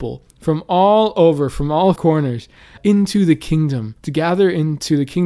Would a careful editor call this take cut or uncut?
cut